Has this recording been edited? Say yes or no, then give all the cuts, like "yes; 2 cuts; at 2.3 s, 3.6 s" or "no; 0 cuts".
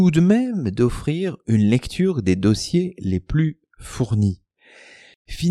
no; 0 cuts